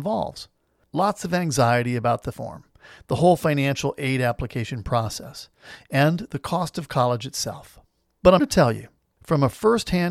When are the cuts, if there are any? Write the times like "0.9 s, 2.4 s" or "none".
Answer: 2.3 s, 8.4 s

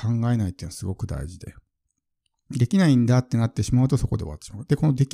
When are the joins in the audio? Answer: none

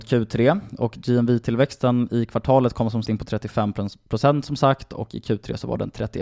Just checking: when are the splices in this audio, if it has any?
3.1 s

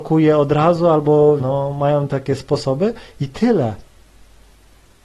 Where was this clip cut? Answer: 1.4 s, 2.4 s

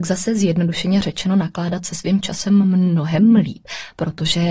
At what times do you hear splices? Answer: none

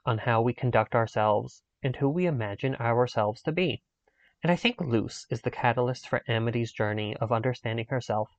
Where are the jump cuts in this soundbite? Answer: none

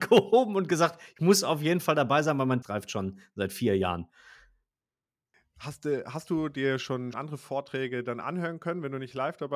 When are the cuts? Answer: 2.6 s, 7.1 s

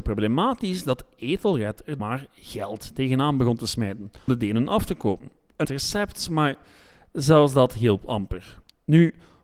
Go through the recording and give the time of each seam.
2.0 s, 4.3 s, 5.6 s

